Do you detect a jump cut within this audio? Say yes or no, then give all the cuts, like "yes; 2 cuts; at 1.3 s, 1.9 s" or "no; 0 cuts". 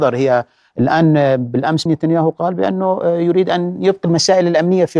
yes; 1 cut; at 1.9 s